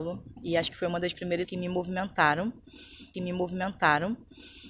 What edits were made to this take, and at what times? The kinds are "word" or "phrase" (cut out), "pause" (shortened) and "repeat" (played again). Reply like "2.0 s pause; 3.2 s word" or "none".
1.4 s word; 3.1 s repeat